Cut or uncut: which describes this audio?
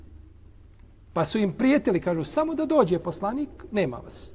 uncut